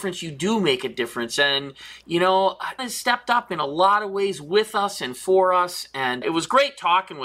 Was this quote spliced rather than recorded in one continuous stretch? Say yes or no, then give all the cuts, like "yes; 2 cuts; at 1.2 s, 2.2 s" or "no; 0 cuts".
yes; 2 cuts; at 2.8 s, 6.2 s